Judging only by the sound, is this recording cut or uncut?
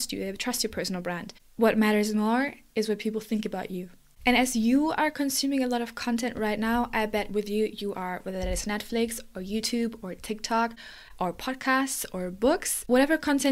uncut